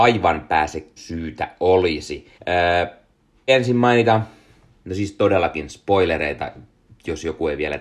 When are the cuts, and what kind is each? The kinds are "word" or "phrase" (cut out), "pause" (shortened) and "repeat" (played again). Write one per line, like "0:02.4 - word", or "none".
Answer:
0:01.0 - phrase
0:02.4 - pause
0:03.5 - word